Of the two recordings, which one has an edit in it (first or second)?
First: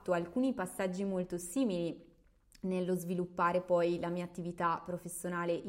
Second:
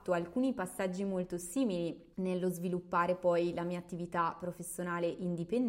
second